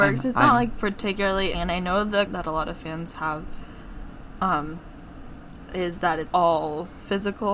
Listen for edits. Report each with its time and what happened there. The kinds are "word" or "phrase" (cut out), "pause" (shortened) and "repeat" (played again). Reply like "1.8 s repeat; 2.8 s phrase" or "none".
1.5 s word; 2.3 s word; 6.3 s word